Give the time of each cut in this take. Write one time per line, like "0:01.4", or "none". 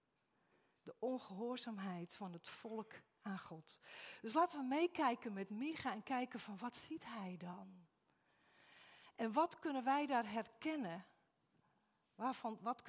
none